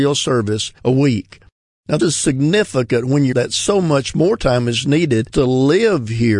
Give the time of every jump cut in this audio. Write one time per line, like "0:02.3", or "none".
0:02.0
0:03.3
0:05.3